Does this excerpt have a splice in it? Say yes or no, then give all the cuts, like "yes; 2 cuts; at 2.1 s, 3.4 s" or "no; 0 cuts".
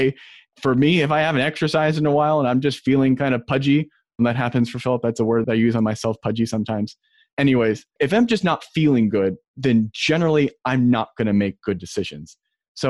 no; 0 cuts